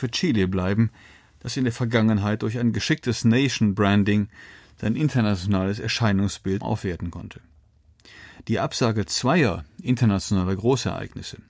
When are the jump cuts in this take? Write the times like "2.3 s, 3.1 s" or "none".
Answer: 6.6 s